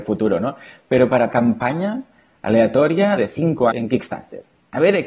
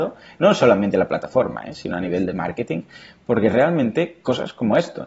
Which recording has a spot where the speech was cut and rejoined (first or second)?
first